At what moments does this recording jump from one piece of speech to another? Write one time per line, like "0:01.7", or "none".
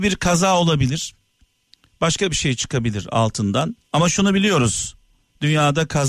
0:03.8